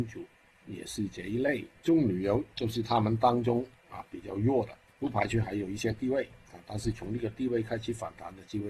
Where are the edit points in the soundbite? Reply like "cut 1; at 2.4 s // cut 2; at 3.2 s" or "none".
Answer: cut 1; at 1.8 s // cut 2; at 4.9 s